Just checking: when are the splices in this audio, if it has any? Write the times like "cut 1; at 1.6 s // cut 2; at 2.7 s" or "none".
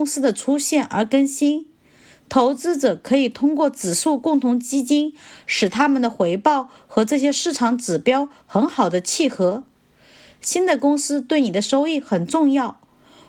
none